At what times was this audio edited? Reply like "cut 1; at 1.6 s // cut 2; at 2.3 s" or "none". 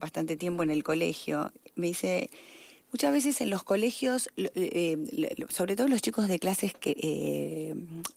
none